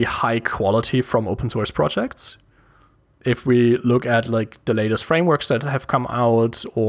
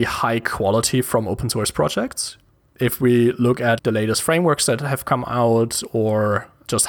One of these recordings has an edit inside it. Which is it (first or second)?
second